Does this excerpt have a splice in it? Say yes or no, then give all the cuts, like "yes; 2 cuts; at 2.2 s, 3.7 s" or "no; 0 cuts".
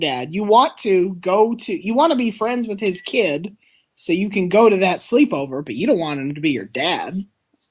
no; 0 cuts